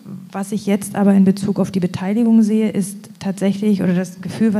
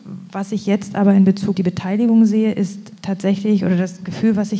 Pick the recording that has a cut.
second; 1 cut; at 1.5 s

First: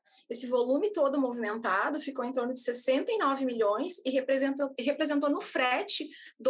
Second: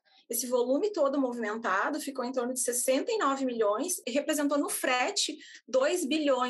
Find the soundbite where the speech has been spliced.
second; 1 cut; at 4.0 s

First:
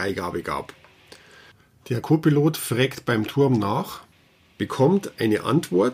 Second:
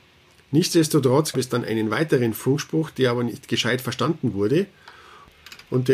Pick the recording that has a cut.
second; 1 cut; at 1.3 s

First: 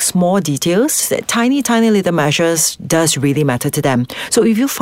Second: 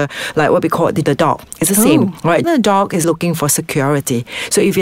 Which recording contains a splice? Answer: second; 3 cuts; at 1.0 s, 2.4 s, 3.0 s

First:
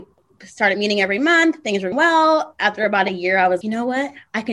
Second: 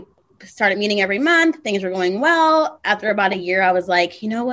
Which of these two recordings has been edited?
first; 2 cuts; at 1.9 s, 3.6 s

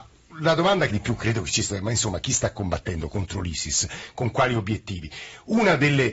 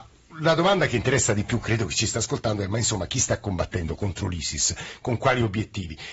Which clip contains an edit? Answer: first; 2 cuts; at 0.9 s, 1.7 s

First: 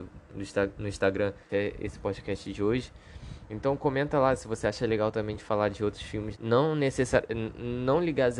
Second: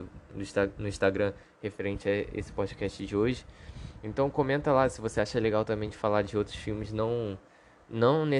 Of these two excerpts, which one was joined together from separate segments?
first; 2 cuts; at 1.5 s, 6.3 s

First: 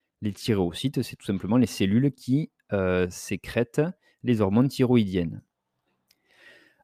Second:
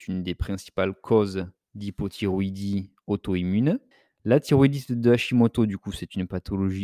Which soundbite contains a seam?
second; 1 cut; at 3.9 s

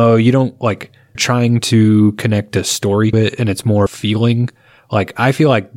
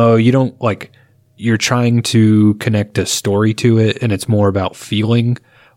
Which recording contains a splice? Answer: first; 3 cuts; at 1.2 s, 3.1 s, 3.9 s

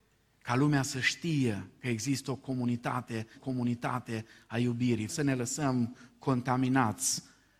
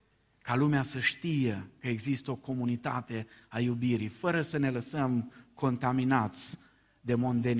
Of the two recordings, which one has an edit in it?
first; 2 cuts; at 3.3 s, 5.1 s

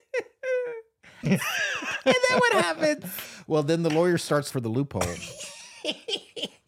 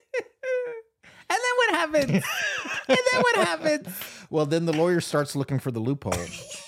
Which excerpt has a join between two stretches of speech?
first; 2 cuts; at 1.2 s, 4.5 s

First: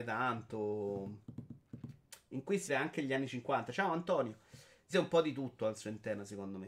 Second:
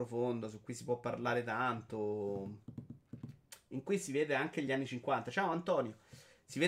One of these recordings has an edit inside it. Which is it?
first; 2 cuts; at 2.7 s, 4.9 s

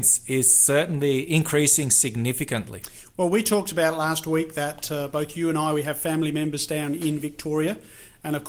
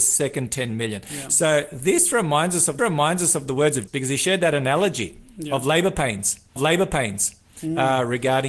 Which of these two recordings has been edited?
second; 3 cuts; at 2.8 s, 3.9 s, 6.6 s

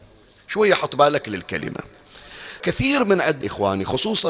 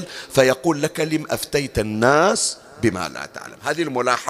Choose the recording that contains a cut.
first; 2 cuts; at 2.6 s, 3.4 s

